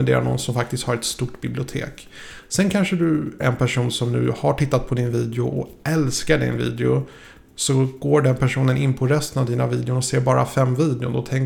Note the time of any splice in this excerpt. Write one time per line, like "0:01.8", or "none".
0:03.4